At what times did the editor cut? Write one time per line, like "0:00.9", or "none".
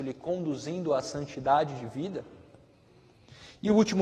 none